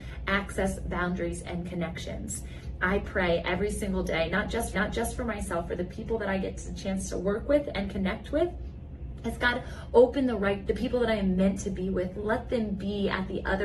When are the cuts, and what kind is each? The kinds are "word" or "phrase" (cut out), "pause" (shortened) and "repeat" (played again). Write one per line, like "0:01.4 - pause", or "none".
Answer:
0:04.7 - repeat
0:10.7 - word